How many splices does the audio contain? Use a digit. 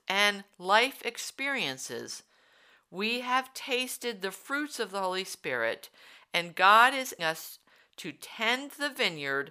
1